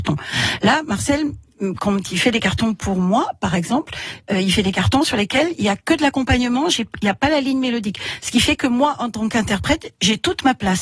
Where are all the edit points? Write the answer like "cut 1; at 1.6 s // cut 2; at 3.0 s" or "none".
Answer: none